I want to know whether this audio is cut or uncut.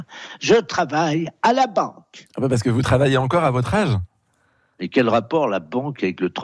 uncut